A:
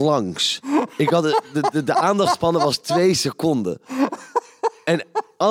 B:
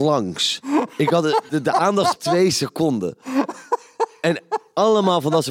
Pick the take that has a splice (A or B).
B